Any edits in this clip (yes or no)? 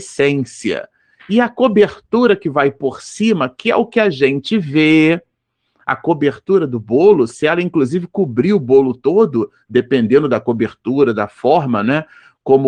no